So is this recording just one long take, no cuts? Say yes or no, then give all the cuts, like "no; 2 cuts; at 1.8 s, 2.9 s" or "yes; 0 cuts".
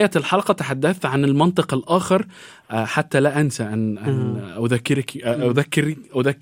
yes; 0 cuts